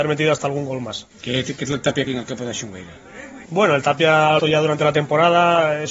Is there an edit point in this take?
yes; 5 cuts; at 1.1 s, 1.7 s, 2.1 s, 3.4 s, 4.4 s

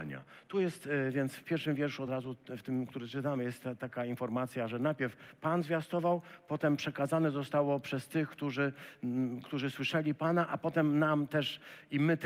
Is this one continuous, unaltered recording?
yes; 0 cuts

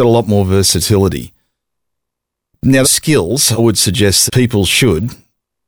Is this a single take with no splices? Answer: no; 3 cuts; at 2.8 s, 3.6 s, 4.3 s

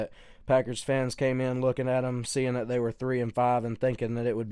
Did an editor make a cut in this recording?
no; 0 cuts

